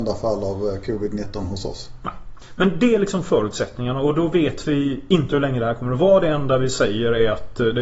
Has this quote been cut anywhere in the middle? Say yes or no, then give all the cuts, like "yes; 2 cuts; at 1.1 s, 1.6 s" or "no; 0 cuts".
no; 0 cuts